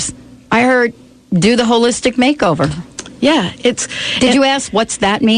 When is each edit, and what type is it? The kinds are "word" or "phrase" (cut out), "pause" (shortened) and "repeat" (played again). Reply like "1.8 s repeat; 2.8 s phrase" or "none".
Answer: none